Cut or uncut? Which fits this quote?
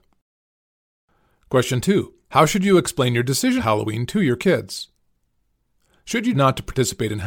cut